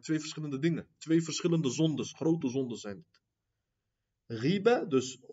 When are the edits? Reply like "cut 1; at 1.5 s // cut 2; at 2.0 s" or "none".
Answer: none